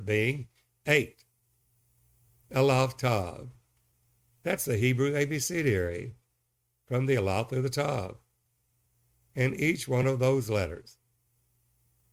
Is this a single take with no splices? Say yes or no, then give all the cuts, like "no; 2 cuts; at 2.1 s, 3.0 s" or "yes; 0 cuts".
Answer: yes; 0 cuts